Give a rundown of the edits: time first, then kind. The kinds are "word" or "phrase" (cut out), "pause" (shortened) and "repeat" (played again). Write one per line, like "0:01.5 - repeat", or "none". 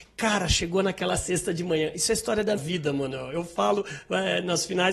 0:02.6 - word